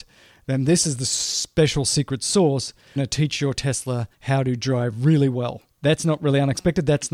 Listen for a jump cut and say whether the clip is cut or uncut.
cut